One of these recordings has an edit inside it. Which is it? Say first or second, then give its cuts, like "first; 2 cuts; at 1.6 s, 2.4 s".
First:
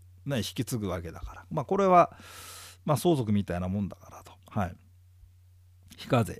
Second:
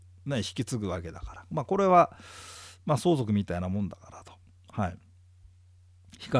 first; 1 cut; at 4.4 s